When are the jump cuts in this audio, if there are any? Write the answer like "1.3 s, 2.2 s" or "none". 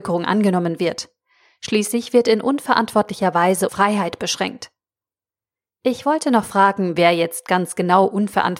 3.7 s